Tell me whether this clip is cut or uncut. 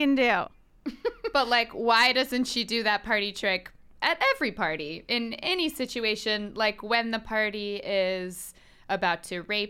uncut